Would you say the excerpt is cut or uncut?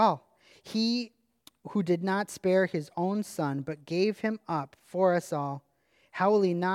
uncut